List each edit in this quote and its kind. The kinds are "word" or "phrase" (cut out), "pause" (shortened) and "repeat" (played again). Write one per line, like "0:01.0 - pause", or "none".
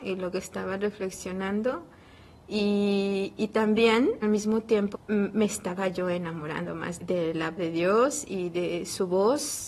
0:04.2 - word
0:04.9 - word
0:07.0 - word
0:07.6 - word